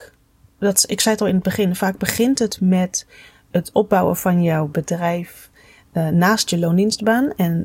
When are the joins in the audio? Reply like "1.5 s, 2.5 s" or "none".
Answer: none